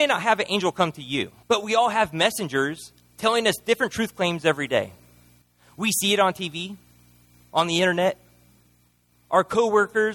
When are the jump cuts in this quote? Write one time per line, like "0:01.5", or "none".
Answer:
0:01.4
0:05.4